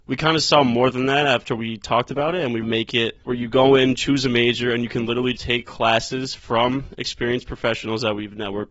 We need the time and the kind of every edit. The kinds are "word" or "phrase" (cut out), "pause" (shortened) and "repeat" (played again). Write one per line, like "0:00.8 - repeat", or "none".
0:02.6 - phrase
0:03.2 - pause
0:05.3 - word